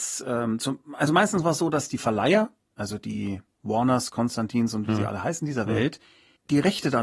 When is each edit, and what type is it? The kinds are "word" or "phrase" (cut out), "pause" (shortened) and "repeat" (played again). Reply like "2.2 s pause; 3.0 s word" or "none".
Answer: none